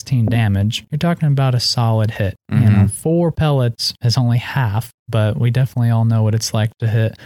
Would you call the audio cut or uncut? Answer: uncut